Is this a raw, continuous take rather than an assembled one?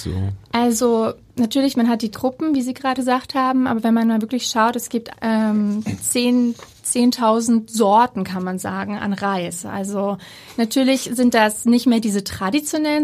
no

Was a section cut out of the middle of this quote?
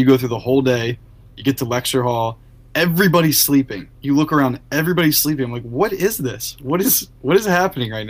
no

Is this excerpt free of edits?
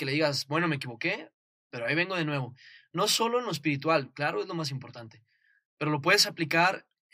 yes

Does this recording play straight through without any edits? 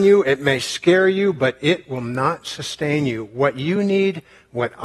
yes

